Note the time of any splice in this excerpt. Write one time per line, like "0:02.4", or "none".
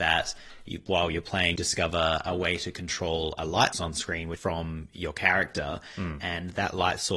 0:01.6
0:03.7
0:04.4